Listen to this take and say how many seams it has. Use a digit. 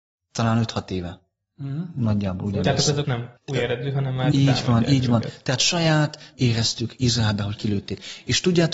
4